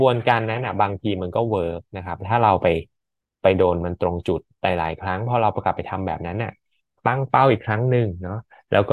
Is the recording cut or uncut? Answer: uncut